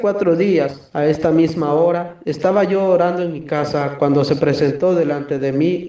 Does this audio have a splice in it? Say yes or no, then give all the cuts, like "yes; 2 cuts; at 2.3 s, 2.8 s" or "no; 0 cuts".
no; 0 cuts